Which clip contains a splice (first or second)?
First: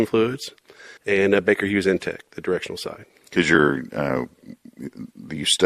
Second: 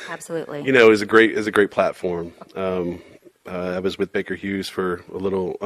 first